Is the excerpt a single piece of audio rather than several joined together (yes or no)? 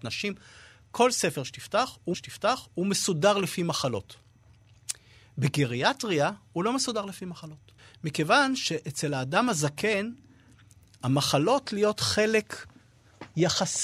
no